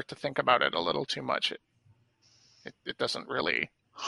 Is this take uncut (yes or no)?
yes